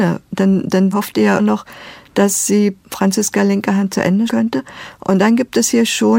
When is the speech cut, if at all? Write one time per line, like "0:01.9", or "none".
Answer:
0:00.9
0:01.4
0:04.3